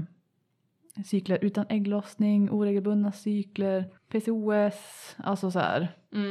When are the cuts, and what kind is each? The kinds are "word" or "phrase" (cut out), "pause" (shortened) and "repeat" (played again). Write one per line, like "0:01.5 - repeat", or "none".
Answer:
0:04.0 - pause